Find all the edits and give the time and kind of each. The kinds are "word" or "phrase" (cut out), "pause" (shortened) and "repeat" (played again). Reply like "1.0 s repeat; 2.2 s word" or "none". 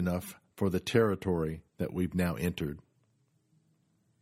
1.7 s pause